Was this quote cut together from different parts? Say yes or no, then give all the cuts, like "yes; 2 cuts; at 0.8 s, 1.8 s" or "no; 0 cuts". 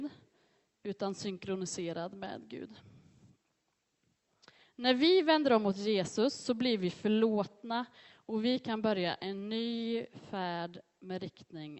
no; 0 cuts